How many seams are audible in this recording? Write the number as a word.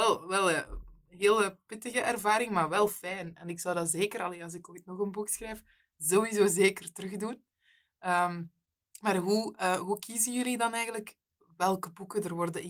zero